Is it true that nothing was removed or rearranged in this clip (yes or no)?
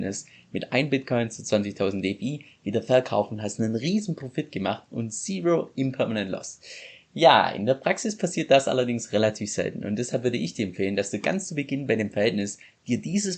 yes